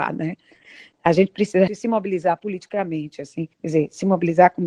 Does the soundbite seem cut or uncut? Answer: cut